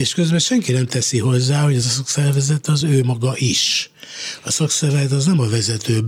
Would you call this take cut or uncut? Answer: uncut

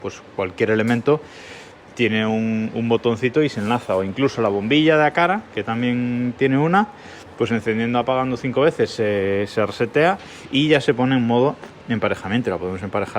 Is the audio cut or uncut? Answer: uncut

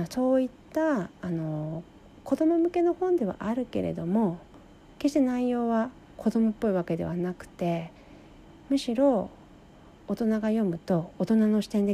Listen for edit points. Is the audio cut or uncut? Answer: uncut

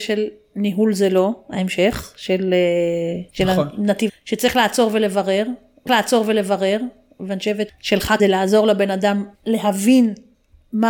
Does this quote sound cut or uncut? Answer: cut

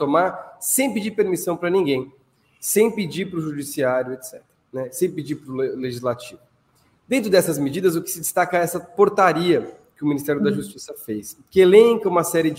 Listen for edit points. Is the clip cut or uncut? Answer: uncut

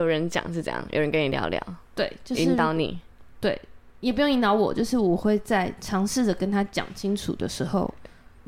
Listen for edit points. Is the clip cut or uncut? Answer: uncut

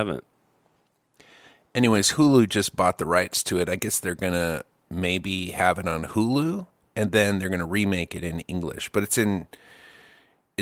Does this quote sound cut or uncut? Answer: uncut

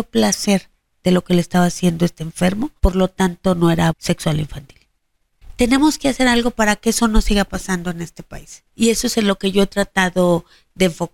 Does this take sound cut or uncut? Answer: cut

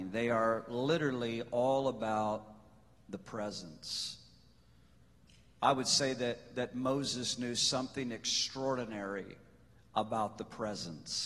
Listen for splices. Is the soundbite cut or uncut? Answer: uncut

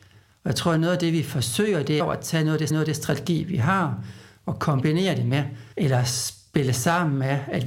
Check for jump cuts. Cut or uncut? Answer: cut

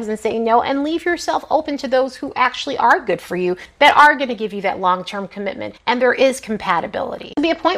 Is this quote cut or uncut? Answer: uncut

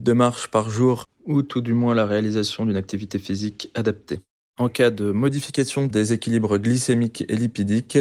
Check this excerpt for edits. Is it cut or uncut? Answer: uncut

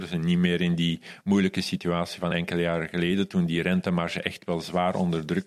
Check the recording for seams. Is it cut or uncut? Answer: uncut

